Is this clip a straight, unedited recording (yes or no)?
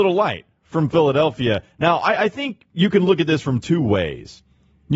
no